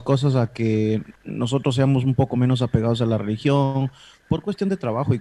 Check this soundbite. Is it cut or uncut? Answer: uncut